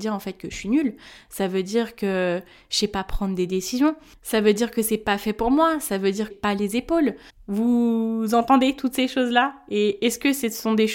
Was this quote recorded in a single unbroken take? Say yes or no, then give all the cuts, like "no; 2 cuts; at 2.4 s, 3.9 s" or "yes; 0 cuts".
no; 2 cuts; at 6.3 s, 7.3 s